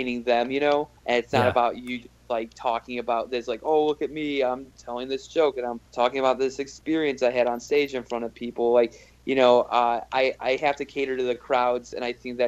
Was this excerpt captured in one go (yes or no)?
no